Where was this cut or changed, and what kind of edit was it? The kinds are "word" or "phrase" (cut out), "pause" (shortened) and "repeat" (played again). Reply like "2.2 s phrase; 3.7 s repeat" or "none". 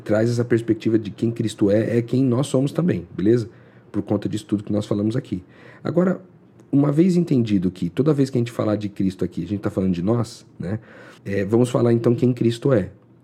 11.2 s pause

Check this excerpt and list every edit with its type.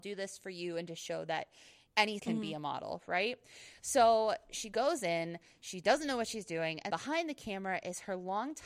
2.2 s word; 6.9 s word

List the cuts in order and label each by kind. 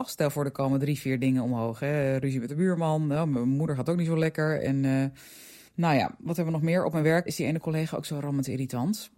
7.3 s word

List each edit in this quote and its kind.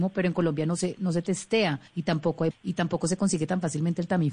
1.9 s pause; 2.5 s word

